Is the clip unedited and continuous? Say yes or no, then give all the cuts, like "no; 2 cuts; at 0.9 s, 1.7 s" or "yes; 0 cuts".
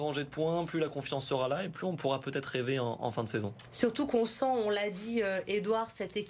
yes; 0 cuts